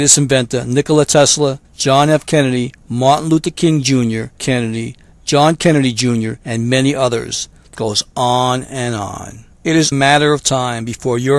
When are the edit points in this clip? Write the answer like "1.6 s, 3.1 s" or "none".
1.6 s, 2.8 s, 4.4 s, 6.4 s, 7.8 s, 9.5 s, 9.9 s